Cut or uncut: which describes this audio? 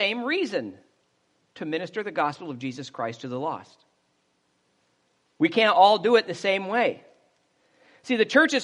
uncut